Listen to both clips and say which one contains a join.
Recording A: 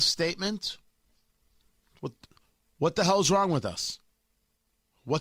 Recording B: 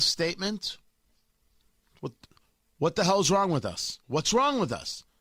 B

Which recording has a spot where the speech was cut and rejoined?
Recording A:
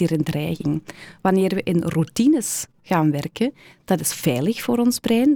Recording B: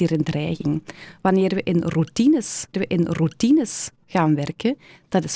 B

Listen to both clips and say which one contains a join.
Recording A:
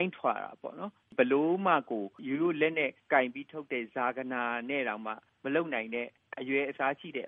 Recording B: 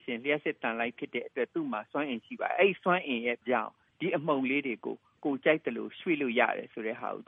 B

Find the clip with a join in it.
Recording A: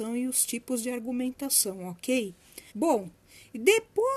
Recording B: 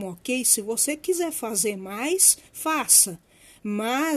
A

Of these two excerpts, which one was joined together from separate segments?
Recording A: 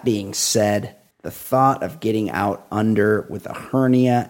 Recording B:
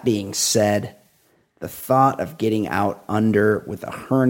A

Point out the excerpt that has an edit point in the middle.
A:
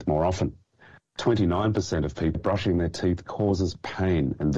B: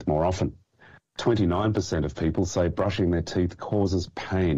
A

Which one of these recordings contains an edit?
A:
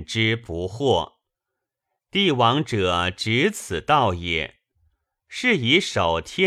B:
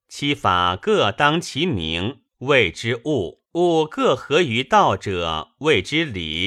B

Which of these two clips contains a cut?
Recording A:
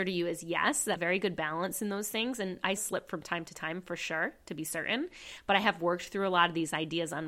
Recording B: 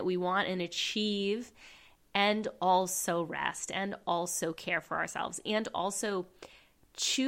A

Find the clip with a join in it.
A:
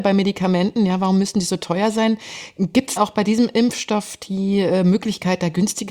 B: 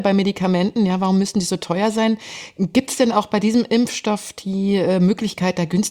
A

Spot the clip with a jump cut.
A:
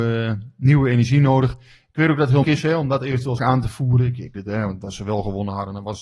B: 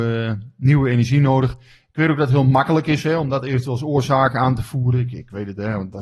A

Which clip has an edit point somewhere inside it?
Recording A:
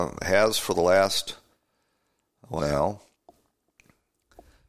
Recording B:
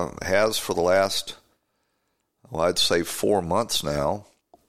A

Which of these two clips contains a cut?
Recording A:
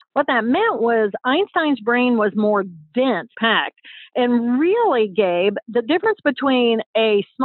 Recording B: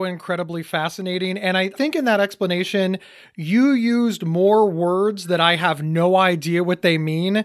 A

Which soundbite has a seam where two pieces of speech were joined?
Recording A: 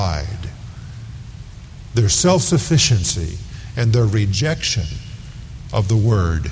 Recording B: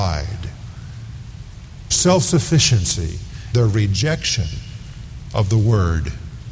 B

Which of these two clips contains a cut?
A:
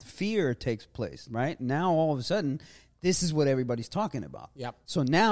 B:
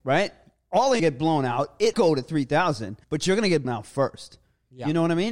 B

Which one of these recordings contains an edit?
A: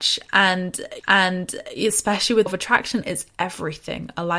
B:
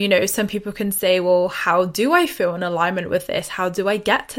A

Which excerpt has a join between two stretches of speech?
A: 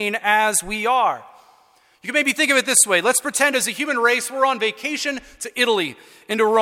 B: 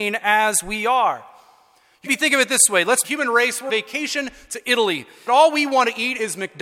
B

